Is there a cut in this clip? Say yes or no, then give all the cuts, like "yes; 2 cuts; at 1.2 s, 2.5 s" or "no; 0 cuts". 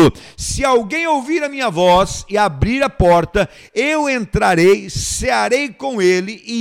no; 0 cuts